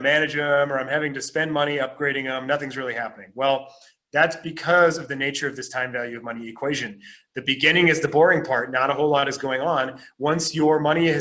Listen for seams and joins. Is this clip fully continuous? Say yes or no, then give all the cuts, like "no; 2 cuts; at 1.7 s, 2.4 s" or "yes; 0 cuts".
yes; 0 cuts